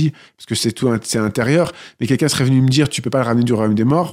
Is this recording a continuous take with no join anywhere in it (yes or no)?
yes